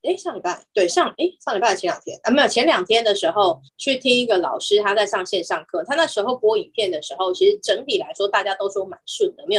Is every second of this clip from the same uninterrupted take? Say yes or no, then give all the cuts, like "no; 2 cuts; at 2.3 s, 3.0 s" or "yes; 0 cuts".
no; 1 cut; at 3.7 s